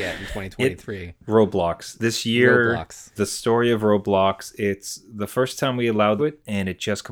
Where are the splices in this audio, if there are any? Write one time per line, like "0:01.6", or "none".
0:01.9
0:03.2
0:06.2